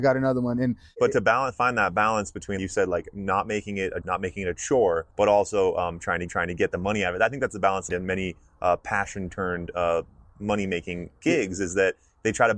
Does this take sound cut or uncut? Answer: cut